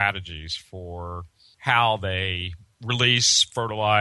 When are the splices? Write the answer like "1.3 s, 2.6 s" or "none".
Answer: none